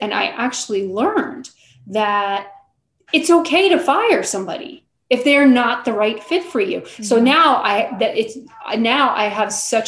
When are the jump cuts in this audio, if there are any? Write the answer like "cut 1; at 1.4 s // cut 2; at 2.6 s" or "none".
none